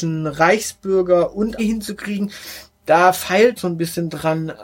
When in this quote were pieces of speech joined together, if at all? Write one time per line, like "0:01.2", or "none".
0:01.6
0:03.6